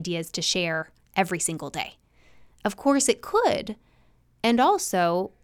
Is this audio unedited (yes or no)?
yes